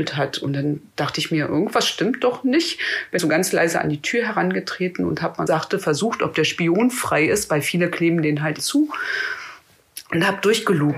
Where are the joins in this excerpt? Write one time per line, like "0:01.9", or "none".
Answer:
0:03.2
0:05.5
0:08.6